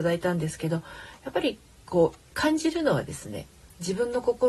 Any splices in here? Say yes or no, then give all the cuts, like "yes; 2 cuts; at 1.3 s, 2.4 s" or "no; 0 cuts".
no; 0 cuts